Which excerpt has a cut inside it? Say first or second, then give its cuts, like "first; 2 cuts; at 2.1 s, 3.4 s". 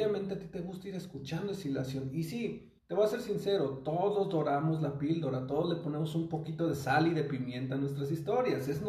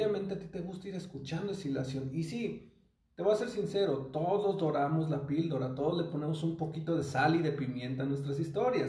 first; 1 cut; at 2.8 s